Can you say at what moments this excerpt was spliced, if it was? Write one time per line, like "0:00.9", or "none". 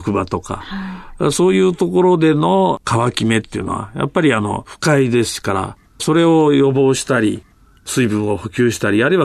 none